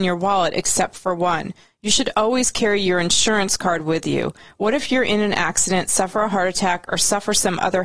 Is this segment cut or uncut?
uncut